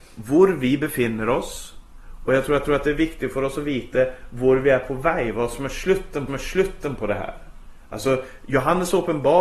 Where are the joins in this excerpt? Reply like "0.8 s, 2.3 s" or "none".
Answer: 2.6 s, 6.3 s